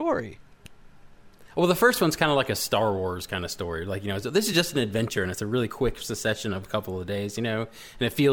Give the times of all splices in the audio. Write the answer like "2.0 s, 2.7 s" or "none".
none